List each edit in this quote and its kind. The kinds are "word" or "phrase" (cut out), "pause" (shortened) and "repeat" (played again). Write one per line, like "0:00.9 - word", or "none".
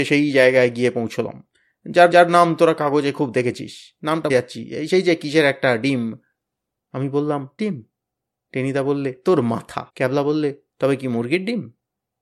0:02.1 - repeat
0:04.3 - word
0:07.6 - word
0:09.9 - pause